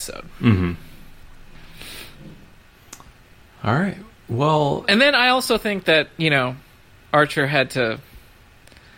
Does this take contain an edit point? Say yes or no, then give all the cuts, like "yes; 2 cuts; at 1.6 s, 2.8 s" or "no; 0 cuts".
no; 0 cuts